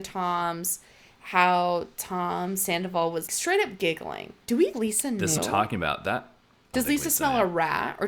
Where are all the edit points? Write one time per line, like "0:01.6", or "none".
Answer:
0:03.3
0:04.7
0:05.4
0:06.7